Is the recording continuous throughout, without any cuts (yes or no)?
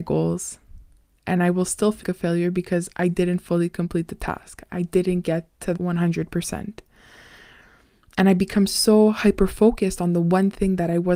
no